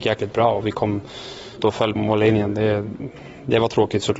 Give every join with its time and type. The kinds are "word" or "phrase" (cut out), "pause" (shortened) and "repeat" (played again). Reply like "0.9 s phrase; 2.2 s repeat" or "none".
1.6 s word; 2.0 s word